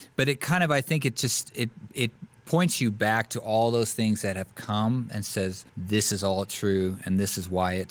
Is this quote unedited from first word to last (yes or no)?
no